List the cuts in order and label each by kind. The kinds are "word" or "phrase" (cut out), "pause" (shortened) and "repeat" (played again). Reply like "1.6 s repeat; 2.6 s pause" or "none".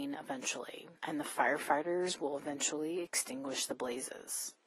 1.0 s pause